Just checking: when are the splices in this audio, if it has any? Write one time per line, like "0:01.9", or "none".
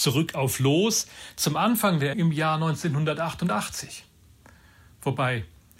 0:02.1